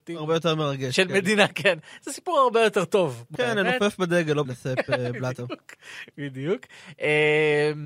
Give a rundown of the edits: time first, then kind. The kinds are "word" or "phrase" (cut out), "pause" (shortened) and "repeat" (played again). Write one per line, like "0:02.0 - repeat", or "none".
0:03.3 - word
0:04.4 - phrase